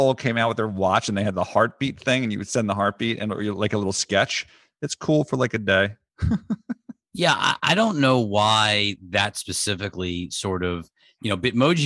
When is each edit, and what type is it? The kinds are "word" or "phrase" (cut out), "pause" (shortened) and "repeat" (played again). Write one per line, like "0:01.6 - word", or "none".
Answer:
none